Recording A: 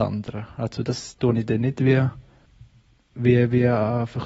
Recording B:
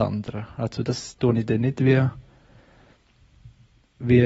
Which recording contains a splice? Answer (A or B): A